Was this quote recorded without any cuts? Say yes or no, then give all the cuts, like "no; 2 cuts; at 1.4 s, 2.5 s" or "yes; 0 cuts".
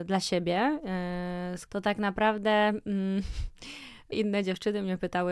no; 2 cuts; at 1.7 s, 4.1 s